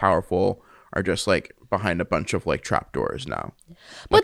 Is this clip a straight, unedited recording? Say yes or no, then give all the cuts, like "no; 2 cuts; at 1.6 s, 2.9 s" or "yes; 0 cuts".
yes; 0 cuts